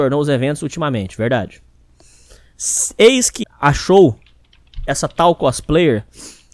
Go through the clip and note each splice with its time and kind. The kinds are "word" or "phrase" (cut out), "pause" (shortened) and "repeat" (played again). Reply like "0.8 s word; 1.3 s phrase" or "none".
3.4 s word